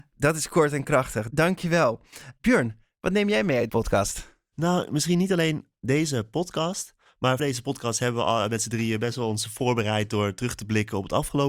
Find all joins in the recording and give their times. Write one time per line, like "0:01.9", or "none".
0:03.7
0:07.4